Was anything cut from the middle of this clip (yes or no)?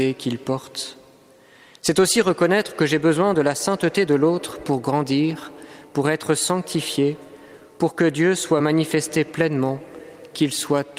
no